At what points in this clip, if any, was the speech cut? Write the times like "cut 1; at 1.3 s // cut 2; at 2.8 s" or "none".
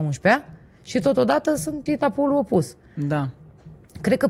cut 1; at 1.9 s